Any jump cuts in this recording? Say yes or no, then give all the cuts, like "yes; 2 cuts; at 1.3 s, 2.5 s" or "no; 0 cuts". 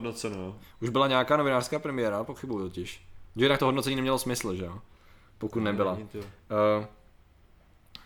no; 0 cuts